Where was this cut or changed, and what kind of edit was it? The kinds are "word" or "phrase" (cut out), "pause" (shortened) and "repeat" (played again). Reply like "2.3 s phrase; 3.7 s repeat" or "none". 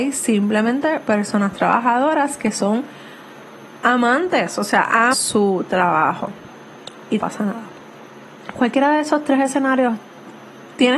5.1 s word; 7.2 s word

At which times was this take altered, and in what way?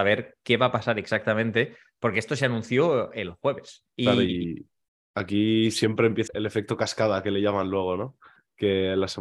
3.9 s pause; 6.3 s word

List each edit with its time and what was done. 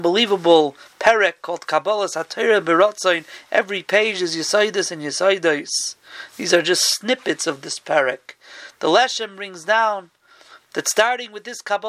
none

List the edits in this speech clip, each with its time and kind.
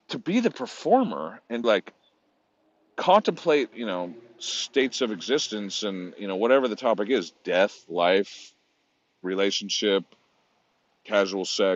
1.6 s word; 3.7 s word

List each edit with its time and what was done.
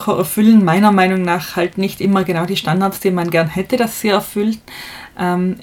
none

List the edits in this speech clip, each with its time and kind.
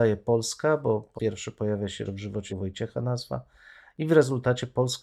1.1 s word; 2.1 s word; 2.5 s word

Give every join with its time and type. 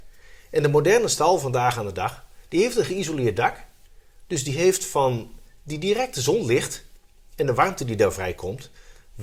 none

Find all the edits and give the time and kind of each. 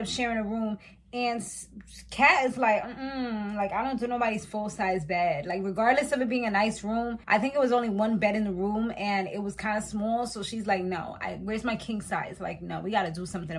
7.2 s pause

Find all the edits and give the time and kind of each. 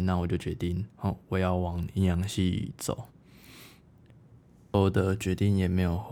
0.9 s pause

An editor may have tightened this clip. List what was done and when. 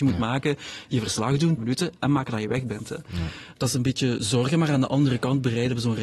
1.6 s word

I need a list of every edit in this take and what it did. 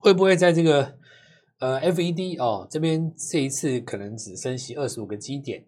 none

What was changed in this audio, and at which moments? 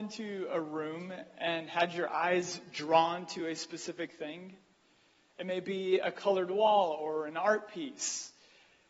none

